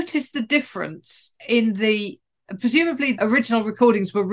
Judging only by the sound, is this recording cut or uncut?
cut